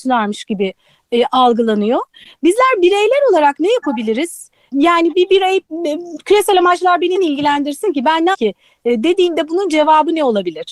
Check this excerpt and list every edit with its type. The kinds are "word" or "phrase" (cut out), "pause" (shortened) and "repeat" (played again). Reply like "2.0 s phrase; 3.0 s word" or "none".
7.2 s word; 8.3 s word